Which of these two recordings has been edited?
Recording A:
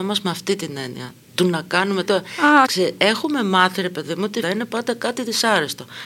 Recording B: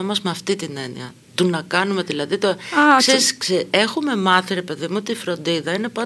A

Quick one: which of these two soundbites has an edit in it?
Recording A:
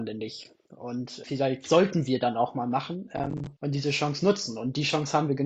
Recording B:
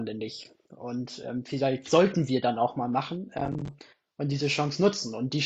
A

